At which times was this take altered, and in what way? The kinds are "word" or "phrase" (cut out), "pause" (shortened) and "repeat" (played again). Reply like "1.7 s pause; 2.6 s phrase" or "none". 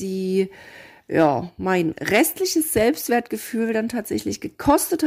none